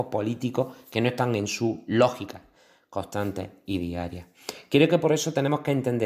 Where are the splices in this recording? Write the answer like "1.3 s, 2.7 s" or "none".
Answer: none